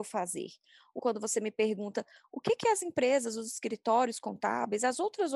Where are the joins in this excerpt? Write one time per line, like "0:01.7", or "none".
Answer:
0:01.0